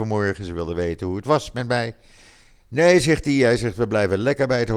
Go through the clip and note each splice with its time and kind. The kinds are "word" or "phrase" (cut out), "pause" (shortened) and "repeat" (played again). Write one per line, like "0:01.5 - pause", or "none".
none